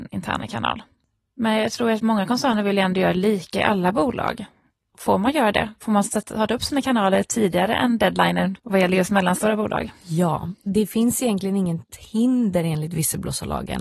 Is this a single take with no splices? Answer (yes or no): no